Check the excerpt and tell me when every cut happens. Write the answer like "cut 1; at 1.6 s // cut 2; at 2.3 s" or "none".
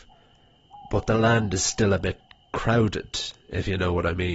none